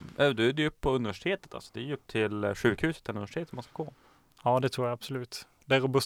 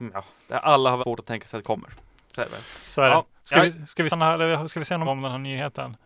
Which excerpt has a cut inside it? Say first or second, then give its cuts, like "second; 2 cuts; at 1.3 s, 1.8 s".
second; 4 cuts; at 1.0 s, 1.6 s, 4.1 s, 5.0 s